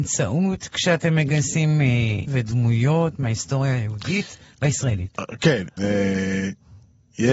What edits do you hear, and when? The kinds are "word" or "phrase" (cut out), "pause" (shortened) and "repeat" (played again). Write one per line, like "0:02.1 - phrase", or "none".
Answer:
0:02.3 - word
0:05.8 - word